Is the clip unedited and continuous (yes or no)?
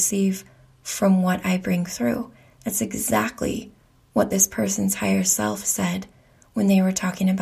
yes